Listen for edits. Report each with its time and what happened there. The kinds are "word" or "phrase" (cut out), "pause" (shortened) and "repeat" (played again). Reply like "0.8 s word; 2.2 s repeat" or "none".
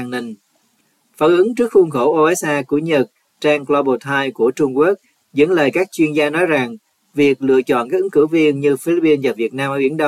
none